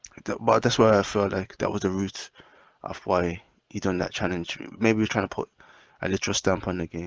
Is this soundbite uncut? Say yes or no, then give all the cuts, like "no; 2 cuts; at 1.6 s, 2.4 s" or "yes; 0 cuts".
yes; 0 cuts